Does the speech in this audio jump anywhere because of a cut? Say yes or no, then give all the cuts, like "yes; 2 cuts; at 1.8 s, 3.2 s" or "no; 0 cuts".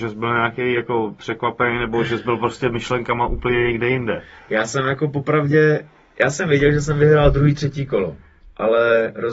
no; 0 cuts